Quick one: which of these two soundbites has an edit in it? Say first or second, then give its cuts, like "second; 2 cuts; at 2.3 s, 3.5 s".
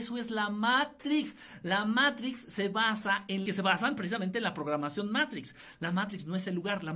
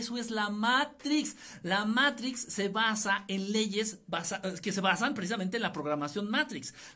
first; 1 cut; at 3.5 s